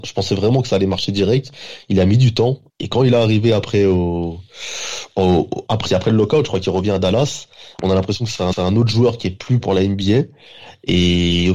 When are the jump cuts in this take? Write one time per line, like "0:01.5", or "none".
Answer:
0:02.7
0:05.9
0:08.5
0:09.6